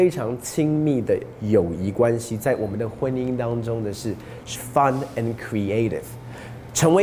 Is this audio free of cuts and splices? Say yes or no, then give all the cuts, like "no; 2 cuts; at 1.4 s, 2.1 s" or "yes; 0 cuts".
no; 1 cut; at 4.6 s